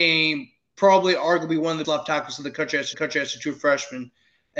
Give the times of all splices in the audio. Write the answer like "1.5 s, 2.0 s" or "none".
1.8 s, 2.9 s

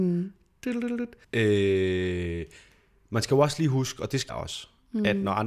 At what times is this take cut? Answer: 1.2 s, 4.3 s

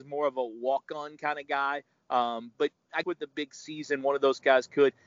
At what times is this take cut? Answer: 2.5 s, 3.0 s

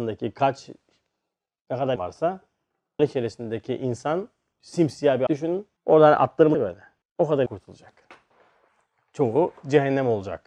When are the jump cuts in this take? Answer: 2.0 s, 3.0 s, 4.5 s, 5.3 s, 5.8 s, 6.5 s, 7.0 s, 7.5 s

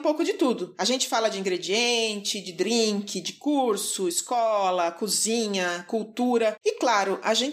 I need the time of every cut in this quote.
none

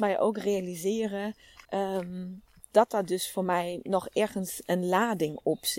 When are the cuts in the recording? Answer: 1.6 s

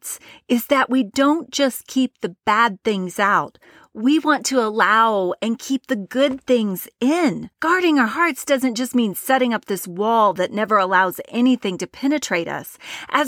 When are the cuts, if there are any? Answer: 7.5 s

